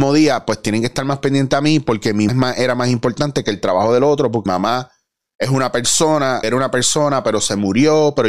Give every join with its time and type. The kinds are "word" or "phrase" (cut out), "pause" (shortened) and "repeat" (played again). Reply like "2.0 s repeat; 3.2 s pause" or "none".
2.3 s word; 4.5 s word; 6.4 s word